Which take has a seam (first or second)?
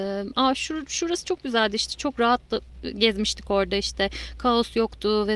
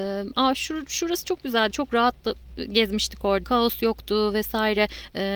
second